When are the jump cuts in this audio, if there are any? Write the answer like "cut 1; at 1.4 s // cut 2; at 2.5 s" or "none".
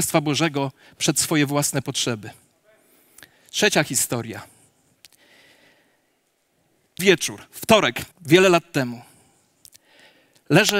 cut 1; at 7.0 s // cut 2; at 8.1 s